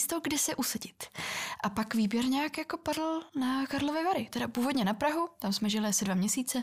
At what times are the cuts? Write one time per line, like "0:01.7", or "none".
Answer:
0:03.3